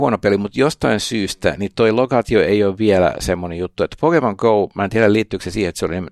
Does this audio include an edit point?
yes; 1 cut; at 1.7 s

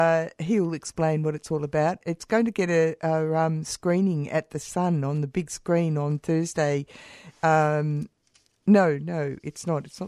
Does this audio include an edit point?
no; 0 cuts

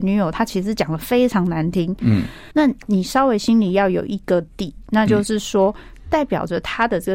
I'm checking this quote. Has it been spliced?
yes; 1 cut; at 2.5 s

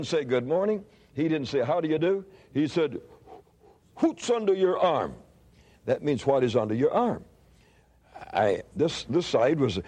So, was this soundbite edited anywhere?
no; 0 cuts

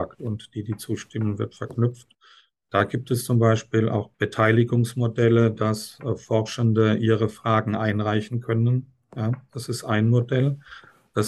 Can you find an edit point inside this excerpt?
no; 0 cuts

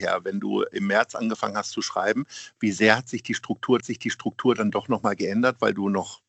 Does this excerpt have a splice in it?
yes; 1 cut; at 3.8 s

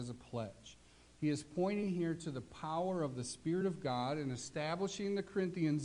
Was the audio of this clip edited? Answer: no; 0 cuts

